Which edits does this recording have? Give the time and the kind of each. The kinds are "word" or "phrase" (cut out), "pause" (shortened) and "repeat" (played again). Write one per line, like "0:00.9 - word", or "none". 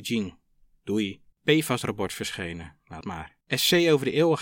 0:01.3 - pause
0:03.0 - word
0:03.4 - pause

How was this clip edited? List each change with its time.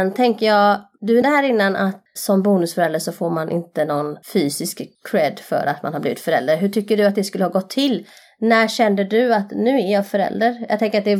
0:01.2 - word
0:02.1 - word
0:04.2 - pause

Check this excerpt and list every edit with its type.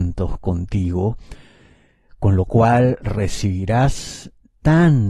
none

